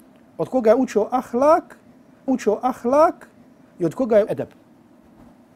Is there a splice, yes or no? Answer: yes